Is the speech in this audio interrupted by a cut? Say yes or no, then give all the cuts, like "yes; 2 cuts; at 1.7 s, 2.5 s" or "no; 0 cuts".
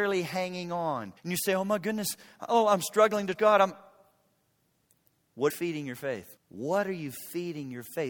yes; 4 cuts; at 1.2 s, 3.4 s, 5.5 s, 6.4 s